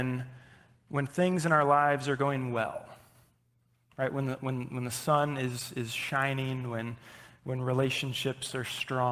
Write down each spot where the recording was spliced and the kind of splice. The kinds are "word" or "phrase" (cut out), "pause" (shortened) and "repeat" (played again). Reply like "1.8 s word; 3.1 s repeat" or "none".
none